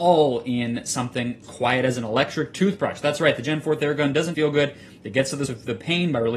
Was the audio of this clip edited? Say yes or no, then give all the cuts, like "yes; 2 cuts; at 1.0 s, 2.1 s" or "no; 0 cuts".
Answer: yes; 3 cuts; at 1.4 s, 4.3 s, 5.5 s